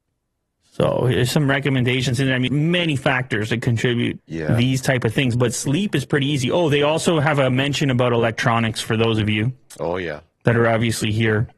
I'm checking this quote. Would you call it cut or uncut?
cut